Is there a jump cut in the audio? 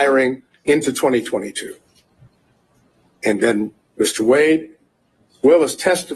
no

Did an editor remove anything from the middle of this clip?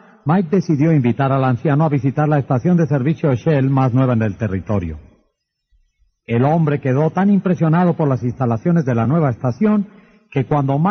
no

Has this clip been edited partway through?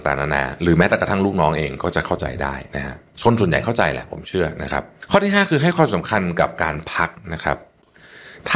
no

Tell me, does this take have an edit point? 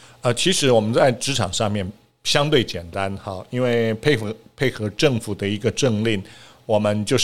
no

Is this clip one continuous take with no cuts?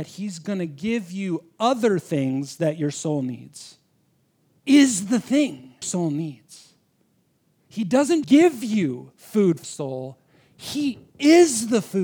no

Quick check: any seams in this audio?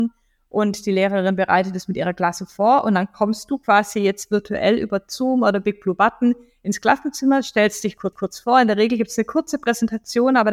yes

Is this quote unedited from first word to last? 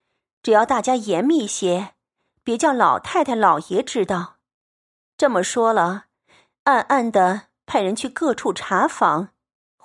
yes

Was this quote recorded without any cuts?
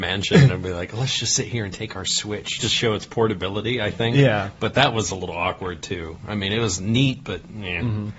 no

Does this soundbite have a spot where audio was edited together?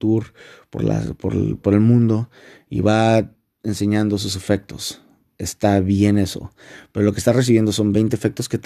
no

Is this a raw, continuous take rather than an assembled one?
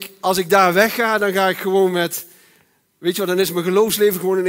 yes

